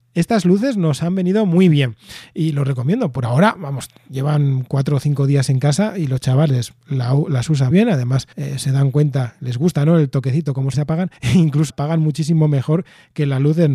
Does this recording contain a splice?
yes; 6 cuts; at 6.8 s, 7.7 s, 8.3 s, 10.7 s, 11.2 s, 11.7 s

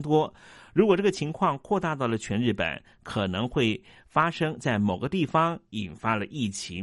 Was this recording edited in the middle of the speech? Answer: no; 0 cuts

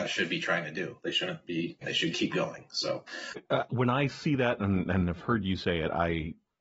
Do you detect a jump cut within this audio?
yes; 1 cut; at 1.8 s

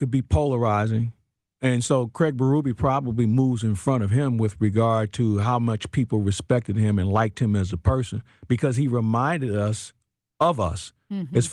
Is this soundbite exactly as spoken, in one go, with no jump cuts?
yes; 0 cuts

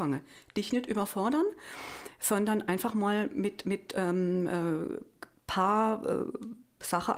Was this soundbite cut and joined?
no; 0 cuts

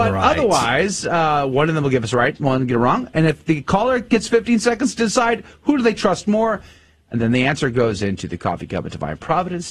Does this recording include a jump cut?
no; 0 cuts

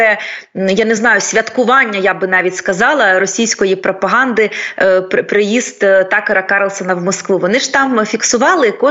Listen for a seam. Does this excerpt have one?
no; 0 cuts

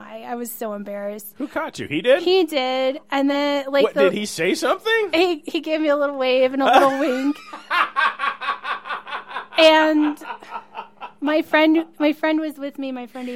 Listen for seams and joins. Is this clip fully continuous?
yes; 0 cuts

